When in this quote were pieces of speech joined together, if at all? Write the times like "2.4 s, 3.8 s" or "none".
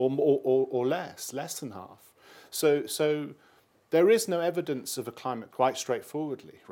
5.5 s